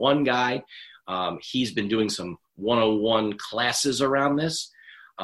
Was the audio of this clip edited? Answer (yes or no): no